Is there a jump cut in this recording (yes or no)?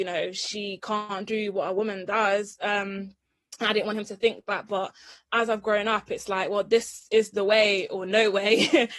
no